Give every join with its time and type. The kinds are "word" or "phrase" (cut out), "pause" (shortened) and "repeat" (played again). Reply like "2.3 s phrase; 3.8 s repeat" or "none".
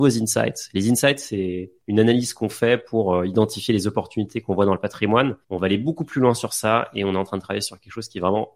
5.4 s pause